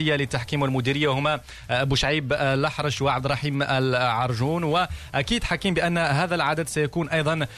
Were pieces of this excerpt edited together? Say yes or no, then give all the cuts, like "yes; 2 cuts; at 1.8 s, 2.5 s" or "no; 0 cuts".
no; 0 cuts